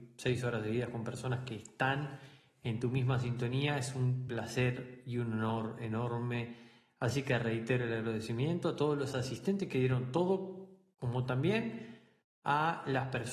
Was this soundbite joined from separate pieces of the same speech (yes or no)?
no